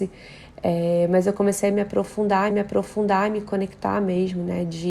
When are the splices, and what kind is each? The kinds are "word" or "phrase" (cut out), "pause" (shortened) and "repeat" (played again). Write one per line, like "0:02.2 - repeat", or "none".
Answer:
0:02.5 - repeat